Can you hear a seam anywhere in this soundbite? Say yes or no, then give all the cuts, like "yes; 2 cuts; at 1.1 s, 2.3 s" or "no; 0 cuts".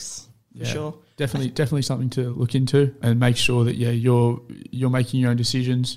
no; 0 cuts